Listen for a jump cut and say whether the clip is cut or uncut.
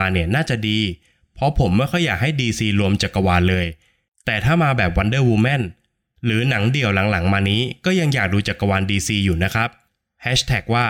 uncut